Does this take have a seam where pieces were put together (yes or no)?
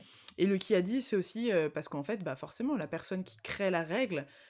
no